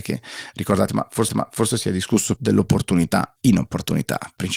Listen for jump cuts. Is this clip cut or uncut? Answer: cut